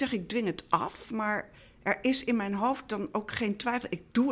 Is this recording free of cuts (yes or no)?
yes